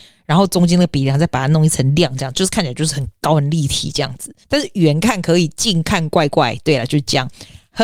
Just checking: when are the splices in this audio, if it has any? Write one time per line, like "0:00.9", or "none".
0:04.4